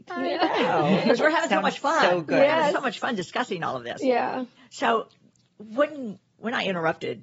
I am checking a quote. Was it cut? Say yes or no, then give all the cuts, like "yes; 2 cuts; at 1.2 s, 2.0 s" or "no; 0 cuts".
no; 0 cuts